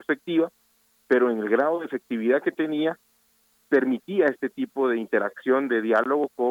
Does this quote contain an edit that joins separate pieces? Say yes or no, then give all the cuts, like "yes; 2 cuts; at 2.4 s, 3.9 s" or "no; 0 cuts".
no; 0 cuts